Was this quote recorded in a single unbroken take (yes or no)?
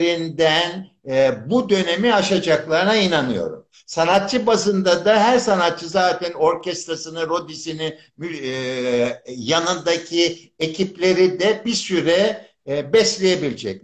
yes